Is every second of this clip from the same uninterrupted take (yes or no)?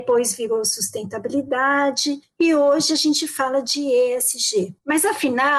yes